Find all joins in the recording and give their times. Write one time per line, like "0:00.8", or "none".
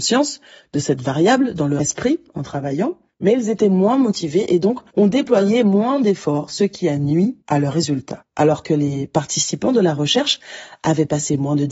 0:07.4